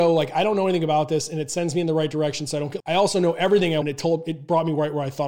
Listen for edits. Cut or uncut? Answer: cut